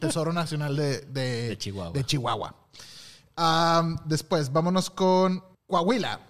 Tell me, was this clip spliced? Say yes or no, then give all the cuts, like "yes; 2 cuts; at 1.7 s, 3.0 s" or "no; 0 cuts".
no; 0 cuts